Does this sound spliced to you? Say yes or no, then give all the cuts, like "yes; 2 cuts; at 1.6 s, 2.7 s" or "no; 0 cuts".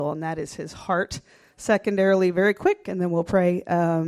no; 0 cuts